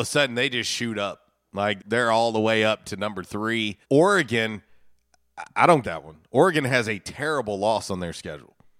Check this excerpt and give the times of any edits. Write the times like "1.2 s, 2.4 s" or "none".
1.8 s, 3.8 s, 5.8 s